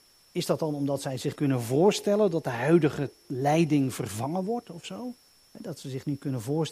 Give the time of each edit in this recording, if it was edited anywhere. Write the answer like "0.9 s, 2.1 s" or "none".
1.4 s, 5.3 s